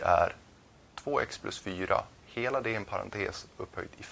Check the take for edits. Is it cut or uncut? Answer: uncut